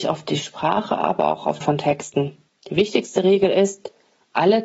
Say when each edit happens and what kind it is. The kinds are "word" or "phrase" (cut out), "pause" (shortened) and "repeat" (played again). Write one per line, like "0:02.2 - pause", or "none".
0:01.6 - phrase
0:02.5 - pause